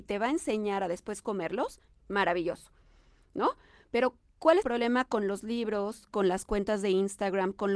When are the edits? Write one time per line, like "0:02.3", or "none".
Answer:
0:04.6

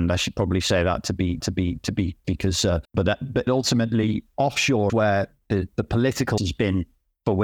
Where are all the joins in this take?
0:01.4
0:02.2
0:02.8
0:03.5
0:04.9
0:05.7
0:06.4

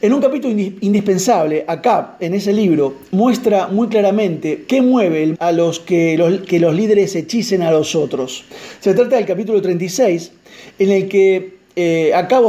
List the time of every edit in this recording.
0:05.3

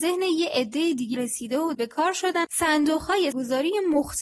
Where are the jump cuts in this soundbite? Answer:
0:01.1
0:01.7
0:02.4
0:03.3

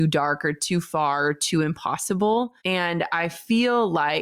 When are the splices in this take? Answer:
0:02.6

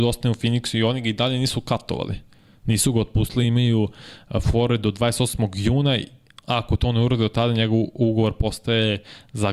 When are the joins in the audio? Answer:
none

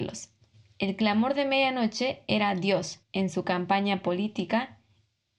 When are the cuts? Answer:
0:03.0

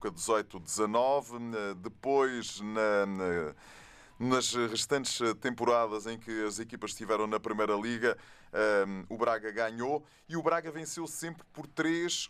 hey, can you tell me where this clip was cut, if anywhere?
none

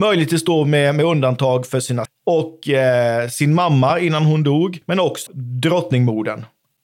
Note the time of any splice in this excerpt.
0:02.1
0:04.8
0:05.3

